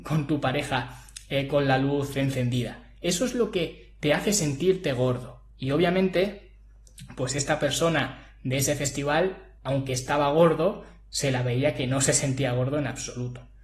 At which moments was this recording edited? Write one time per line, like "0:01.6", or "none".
0:05.5
0:09.6